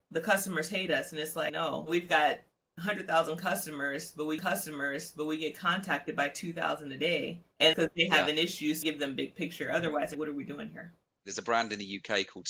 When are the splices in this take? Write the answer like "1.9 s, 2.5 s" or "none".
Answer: 1.5 s, 4.4 s, 7.7 s, 8.8 s, 10.1 s

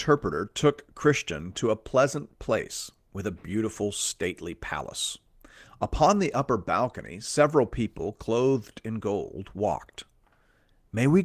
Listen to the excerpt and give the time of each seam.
none

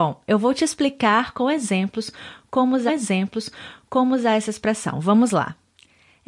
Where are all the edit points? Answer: 2.9 s

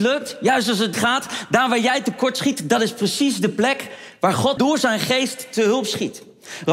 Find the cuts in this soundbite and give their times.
0.9 s, 4.6 s

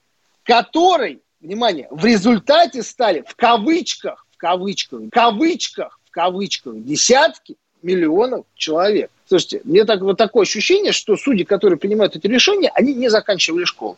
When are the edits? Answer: 5.1 s, 9.2 s

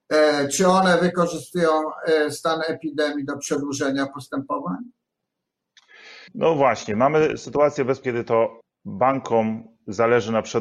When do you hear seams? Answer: 6.3 s, 8.0 s, 8.6 s

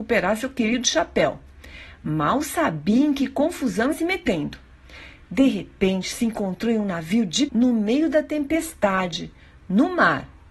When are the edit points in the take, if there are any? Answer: 3.9 s, 7.5 s

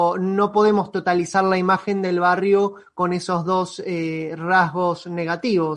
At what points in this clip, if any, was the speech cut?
none

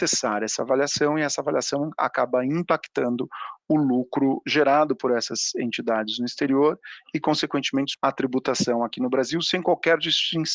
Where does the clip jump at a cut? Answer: 7.9 s

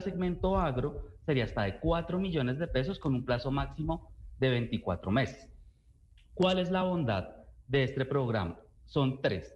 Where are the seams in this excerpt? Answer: none

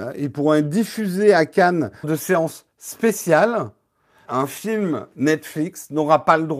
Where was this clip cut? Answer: 2.0 s, 4.3 s

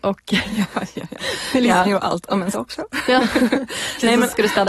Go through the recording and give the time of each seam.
1.8 s, 2.5 s

